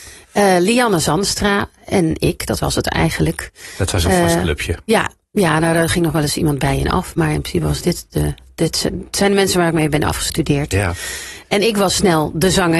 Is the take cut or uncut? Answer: uncut